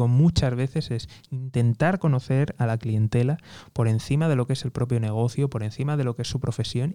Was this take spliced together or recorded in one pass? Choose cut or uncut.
uncut